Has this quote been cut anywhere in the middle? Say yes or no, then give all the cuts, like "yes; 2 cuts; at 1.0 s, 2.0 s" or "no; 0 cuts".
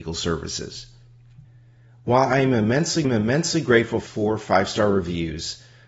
yes; 3 cuts; at 1.4 s, 3.0 s, 4.1 s